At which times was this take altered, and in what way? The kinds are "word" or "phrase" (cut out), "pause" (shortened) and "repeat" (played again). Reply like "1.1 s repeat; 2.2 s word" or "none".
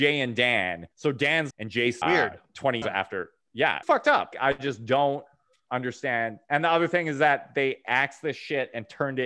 0.9 s pause; 1.5 s phrase; 2.0 s phrase; 2.8 s word; 3.8 s phrase; 4.3 s word